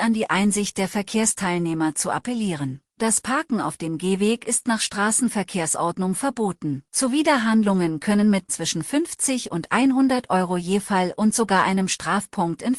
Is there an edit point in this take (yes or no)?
yes